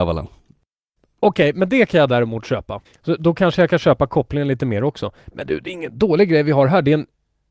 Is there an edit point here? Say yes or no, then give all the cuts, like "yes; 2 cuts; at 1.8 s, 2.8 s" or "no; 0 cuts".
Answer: yes; 1 cut; at 2.8 s